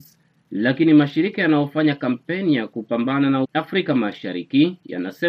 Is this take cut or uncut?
cut